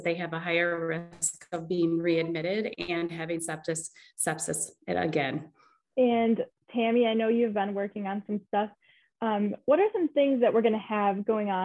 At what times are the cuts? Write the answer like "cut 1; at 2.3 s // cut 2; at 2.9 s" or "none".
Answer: none

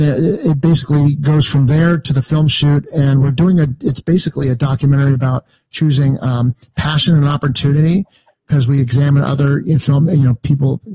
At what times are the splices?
none

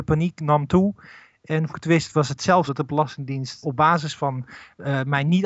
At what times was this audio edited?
cut 1; at 1.7 s // cut 2; at 2.7 s // cut 3; at 3.6 s

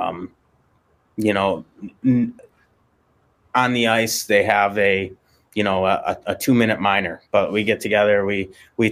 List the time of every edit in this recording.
cut 1; at 6.2 s

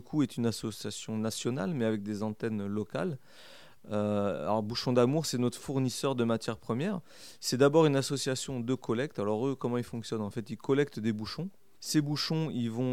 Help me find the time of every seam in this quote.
none

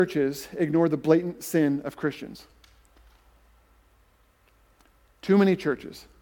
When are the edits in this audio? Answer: none

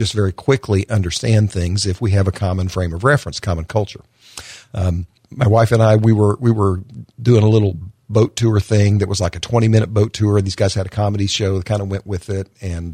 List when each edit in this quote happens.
cut 1; at 5.2 s

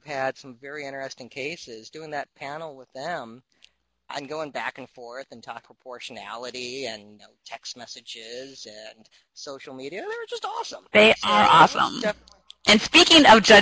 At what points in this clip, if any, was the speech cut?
cut 1; at 4.1 s // cut 2; at 5.6 s // cut 3; at 7.2 s

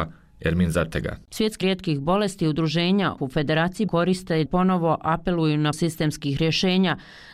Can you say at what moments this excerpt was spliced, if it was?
cut 1; at 1.6 s // cut 2; at 3.2 s // cut 3; at 3.9 s // cut 4; at 4.5 s // cut 5; at 5.7 s

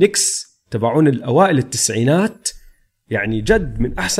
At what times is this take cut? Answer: none

